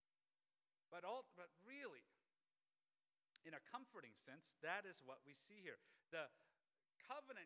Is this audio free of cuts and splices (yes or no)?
yes